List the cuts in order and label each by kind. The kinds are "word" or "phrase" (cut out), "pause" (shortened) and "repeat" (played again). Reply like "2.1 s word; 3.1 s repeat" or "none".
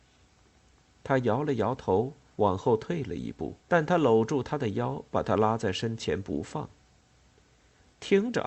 3.6 s pause